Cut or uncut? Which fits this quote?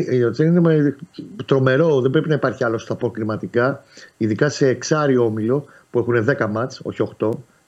uncut